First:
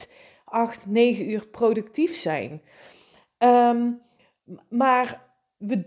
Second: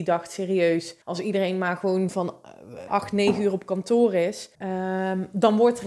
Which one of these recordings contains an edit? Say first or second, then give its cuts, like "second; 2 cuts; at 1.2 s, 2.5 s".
second; 3 cuts; at 1.0 s, 2.9 s, 4.5 s